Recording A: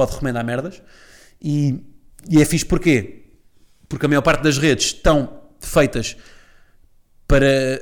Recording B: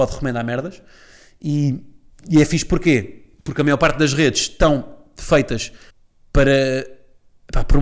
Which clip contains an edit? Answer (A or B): B